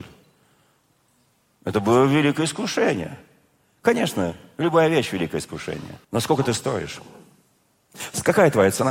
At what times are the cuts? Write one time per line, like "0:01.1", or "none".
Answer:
0:06.0